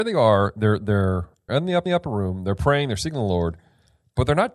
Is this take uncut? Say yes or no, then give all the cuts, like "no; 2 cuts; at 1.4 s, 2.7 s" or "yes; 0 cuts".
no; 2 cuts; at 1.5 s, 1.9 s